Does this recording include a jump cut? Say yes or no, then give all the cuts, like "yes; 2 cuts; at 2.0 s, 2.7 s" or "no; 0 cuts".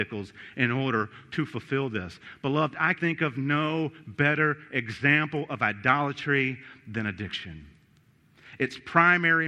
yes; 1 cut; at 3.0 s